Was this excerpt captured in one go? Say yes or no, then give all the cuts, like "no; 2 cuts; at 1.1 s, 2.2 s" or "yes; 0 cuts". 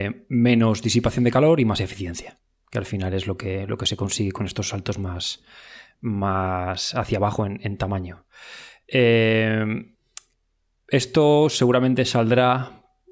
yes; 0 cuts